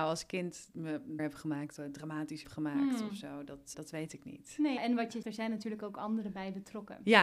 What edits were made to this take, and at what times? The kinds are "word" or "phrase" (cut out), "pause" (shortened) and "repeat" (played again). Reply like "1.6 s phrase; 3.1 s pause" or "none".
1.2 s word; 1.8 s word; 2.4 s word; 3.7 s word; 4.8 s word; 5.2 s word